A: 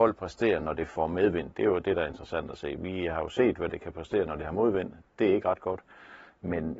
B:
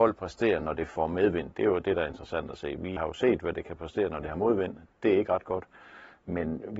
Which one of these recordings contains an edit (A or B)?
B